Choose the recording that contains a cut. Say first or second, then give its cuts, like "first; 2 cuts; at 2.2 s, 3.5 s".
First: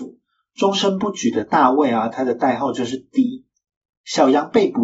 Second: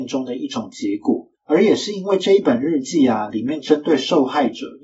second; 1 cut; at 1.3 s